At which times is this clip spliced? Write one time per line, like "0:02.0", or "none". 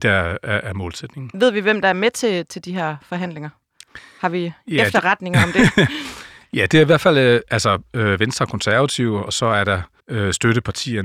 0:10.0